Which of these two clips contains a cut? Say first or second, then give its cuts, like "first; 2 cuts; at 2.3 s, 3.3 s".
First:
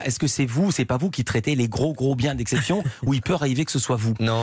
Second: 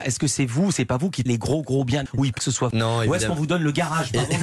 second; 4 cuts; at 1.3 s, 2.1 s, 2.4 s, 2.7 s